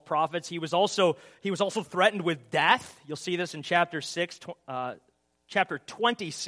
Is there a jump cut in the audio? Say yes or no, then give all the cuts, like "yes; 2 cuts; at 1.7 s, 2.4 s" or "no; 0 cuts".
no; 0 cuts